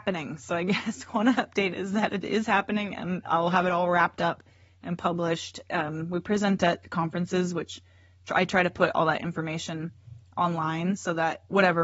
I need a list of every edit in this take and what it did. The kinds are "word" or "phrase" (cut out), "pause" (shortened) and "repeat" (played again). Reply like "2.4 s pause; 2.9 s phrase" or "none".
none